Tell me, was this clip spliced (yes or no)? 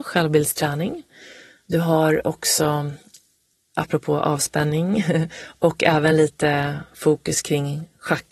no